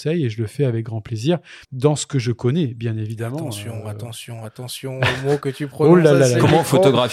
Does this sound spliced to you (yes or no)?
yes